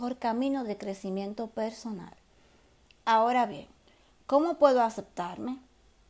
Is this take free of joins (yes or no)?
yes